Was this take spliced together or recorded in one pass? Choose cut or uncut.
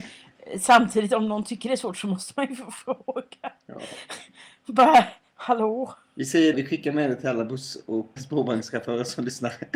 cut